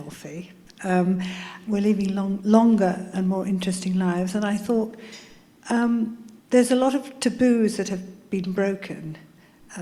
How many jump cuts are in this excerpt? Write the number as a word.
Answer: three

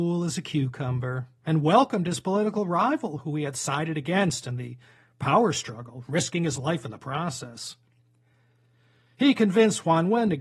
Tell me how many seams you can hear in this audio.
zero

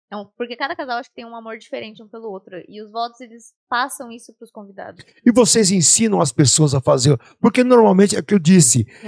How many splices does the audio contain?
one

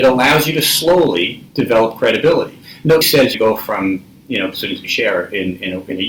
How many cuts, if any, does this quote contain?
five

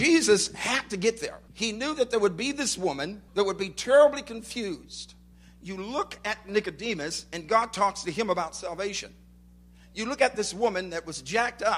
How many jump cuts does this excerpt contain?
two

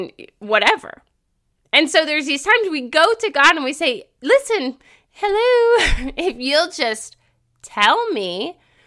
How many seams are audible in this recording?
zero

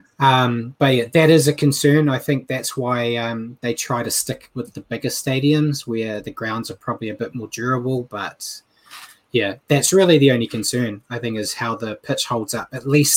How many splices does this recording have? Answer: zero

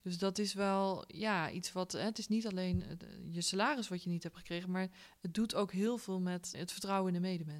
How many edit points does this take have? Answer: one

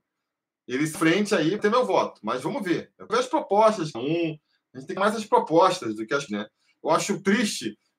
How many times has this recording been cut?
six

